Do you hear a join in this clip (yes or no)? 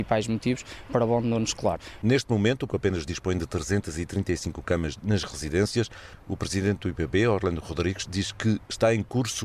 yes